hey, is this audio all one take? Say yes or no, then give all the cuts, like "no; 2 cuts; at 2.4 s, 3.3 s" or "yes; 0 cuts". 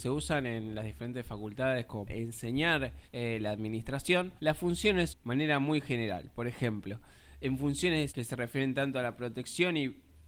no; 5 cuts; at 2.1 s, 3.1 s, 4.4 s, 5.1 s, 8.1 s